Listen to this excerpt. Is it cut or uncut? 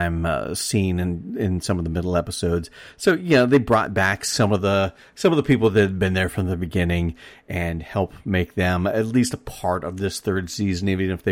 uncut